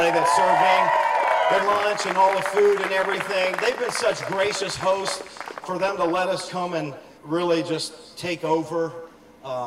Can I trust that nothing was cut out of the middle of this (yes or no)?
no